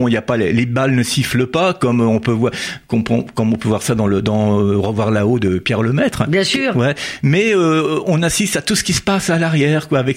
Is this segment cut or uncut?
uncut